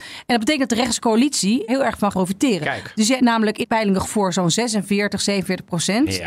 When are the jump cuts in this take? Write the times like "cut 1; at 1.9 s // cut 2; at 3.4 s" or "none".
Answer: cut 1; at 1.7 s // cut 2; at 2.1 s // cut 3; at 3.2 s // cut 4; at 3.6 s // cut 5; at 4.0 s